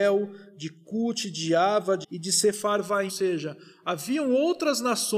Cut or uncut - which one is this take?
cut